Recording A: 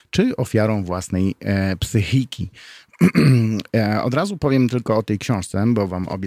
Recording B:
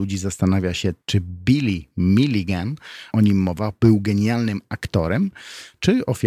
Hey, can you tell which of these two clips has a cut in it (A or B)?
B